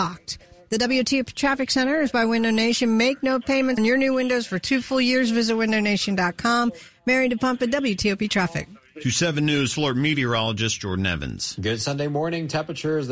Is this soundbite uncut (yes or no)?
no